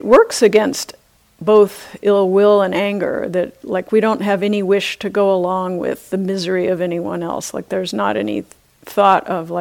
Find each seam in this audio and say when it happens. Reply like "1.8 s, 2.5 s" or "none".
none